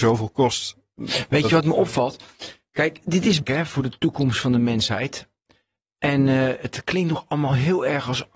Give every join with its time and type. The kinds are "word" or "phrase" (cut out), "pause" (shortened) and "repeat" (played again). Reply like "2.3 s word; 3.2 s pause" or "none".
3.4 s phrase

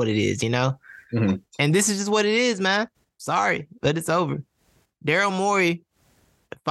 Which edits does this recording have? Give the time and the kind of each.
2.9 s pause

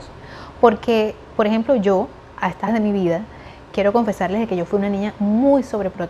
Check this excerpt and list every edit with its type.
2.7 s word

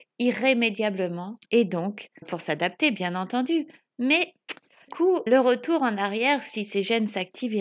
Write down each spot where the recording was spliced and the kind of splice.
1.5 s pause; 2.2 s word; 4.9 s word; 5.3 s word

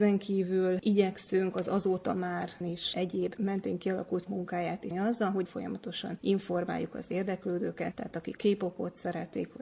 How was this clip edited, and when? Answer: 2.6 s word; 3.4 s word; 4.3 s word; 4.9 s word; 5.5 s word; 8.4 s word

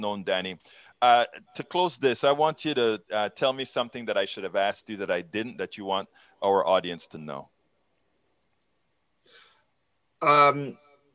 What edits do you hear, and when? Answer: none

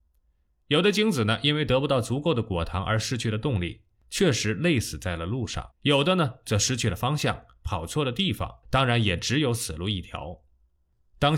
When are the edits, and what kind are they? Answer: 5.7 s pause; 8.6 s pause

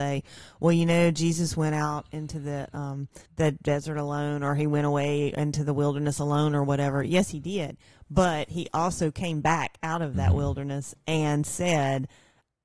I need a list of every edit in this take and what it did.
3.3 s pause

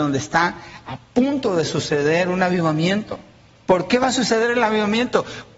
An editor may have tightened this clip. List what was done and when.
none

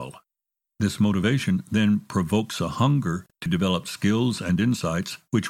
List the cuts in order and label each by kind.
none

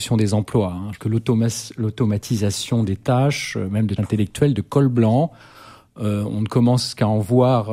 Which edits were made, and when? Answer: 1.0 s word; 4.0 s word

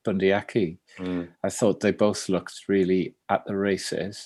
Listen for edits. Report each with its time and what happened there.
1.3 s pause

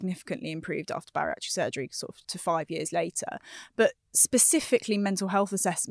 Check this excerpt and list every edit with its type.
2.2 s word

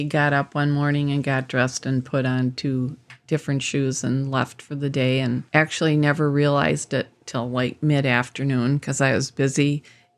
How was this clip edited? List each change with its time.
5.5 s pause

